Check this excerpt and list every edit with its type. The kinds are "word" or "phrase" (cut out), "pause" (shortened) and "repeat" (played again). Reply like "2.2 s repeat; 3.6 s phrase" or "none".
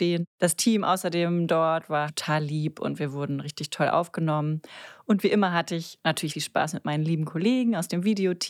2.1 s word; 6.3 s word